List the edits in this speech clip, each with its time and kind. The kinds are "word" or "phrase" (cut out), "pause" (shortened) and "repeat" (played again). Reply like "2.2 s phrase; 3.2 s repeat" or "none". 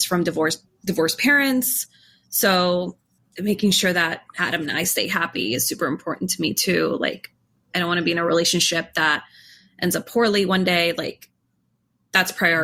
none